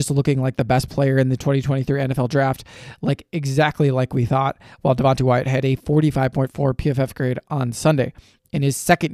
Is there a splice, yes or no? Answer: no